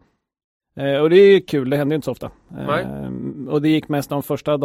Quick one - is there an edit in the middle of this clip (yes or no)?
no